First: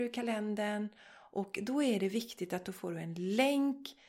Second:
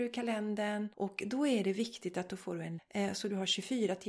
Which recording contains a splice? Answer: second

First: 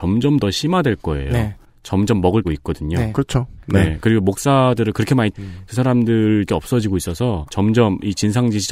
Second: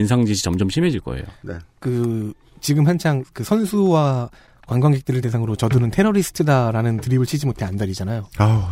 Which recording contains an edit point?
first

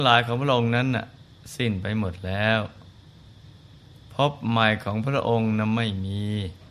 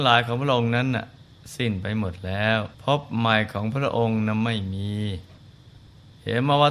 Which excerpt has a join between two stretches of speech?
second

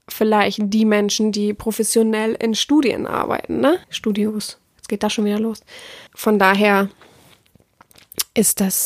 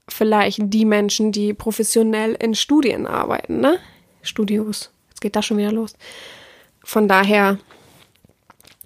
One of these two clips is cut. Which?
first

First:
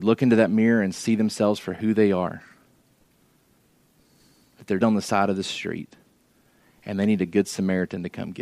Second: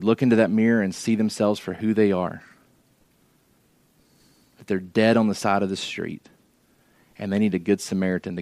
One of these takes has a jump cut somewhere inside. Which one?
first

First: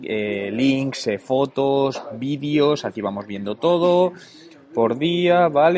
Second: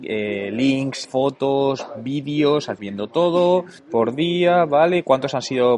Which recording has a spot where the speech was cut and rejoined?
second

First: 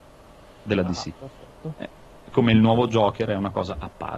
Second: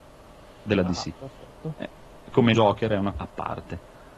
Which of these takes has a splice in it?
second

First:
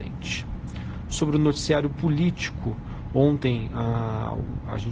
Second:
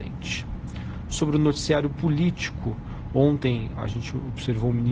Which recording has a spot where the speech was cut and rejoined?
second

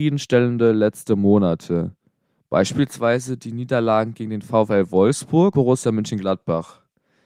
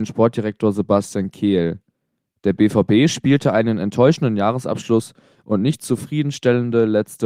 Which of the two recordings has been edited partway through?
first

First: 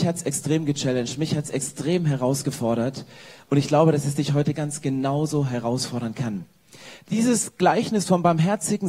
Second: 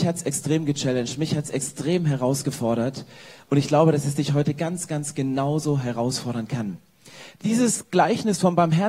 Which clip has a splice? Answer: first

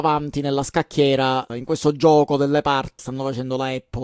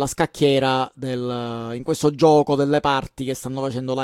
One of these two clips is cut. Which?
first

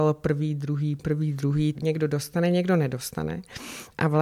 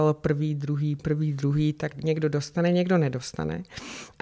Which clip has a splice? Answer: first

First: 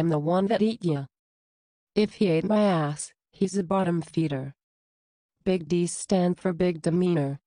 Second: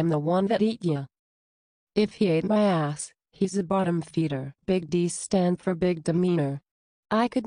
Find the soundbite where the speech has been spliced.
second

